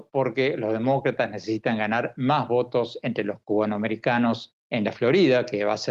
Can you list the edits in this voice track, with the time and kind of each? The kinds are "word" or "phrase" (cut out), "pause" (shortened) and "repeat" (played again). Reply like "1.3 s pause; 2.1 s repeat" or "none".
4.6 s pause